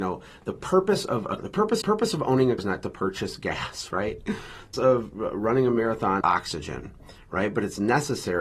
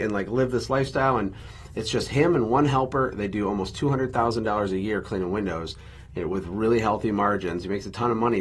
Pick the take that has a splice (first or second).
first